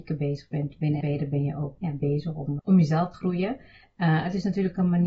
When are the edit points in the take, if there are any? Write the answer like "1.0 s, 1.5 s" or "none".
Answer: 1.0 s, 1.8 s, 2.6 s, 3.1 s

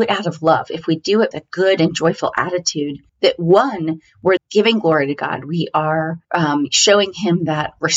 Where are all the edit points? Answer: 1.3 s, 3.1 s, 4.4 s, 6.2 s

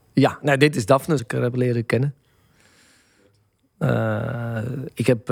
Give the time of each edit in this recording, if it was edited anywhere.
1.2 s

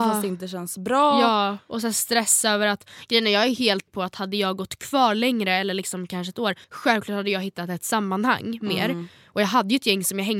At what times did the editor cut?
3.9 s, 6.6 s

